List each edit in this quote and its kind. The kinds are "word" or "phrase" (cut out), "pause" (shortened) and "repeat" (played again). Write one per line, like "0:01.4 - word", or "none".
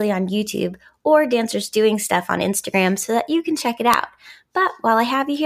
none